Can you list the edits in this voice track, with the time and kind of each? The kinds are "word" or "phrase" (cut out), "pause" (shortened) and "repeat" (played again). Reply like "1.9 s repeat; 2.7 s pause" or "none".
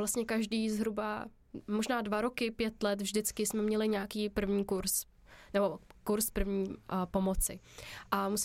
none